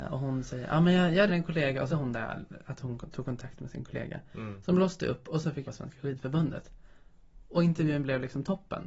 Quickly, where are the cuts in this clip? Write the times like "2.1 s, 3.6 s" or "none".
1.3 s, 1.9 s, 5.7 s